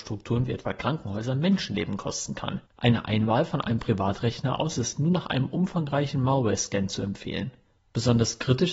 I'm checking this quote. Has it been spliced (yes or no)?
yes